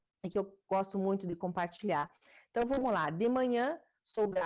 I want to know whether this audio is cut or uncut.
uncut